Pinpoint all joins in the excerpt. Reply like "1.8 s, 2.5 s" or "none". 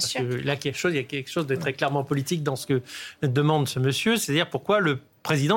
none